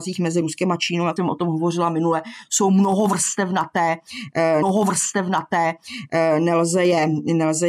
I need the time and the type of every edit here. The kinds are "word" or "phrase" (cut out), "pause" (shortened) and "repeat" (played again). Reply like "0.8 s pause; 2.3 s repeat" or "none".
1.2 s word; 4.6 s repeat